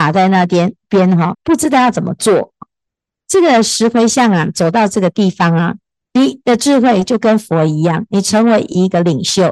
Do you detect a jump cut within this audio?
yes; 1 cut; at 1.3 s

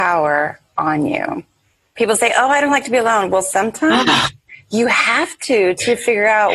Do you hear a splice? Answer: no; 0 cuts

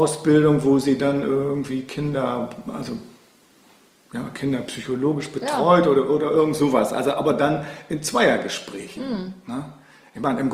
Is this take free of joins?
yes; 0 cuts

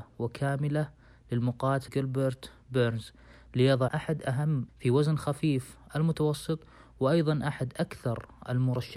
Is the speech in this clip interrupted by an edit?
yes; 3 cuts; at 1.9 s, 3.9 s, 4.7 s

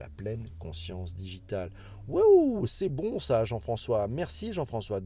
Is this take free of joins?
yes; 0 cuts

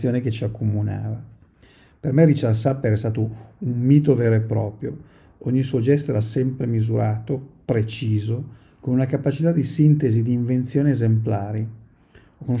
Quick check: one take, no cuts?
yes; 0 cuts

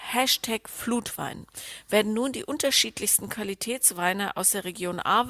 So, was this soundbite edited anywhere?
no; 0 cuts

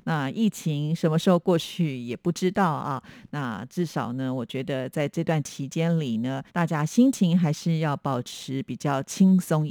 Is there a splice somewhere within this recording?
yes; 1 cut; at 6.5 s

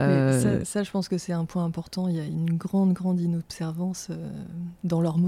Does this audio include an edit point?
no; 0 cuts

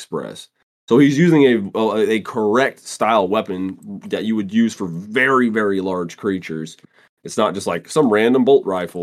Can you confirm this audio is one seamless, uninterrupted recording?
yes; 0 cuts

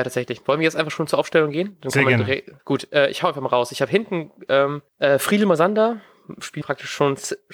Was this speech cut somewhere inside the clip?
yes; 3 cuts; at 2.6 s, 4.9 s, 6.6 s

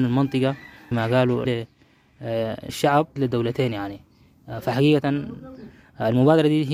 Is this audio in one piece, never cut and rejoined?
no; 4 cuts; at 0.9 s, 1.5 s, 2.7 s, 3.2 s

